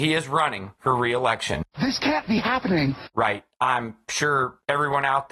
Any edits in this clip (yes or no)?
yes